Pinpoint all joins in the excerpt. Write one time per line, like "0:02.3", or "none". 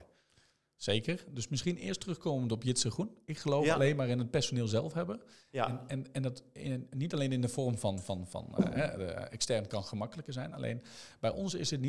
none